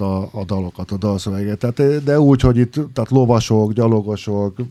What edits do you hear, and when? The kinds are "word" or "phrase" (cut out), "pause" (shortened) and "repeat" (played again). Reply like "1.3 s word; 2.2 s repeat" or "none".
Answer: none